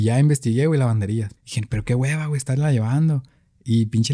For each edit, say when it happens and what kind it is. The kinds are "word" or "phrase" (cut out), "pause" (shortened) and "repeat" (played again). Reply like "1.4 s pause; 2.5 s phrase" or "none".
1.4 s pause